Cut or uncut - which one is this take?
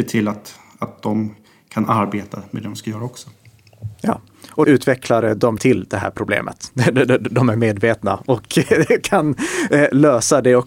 cut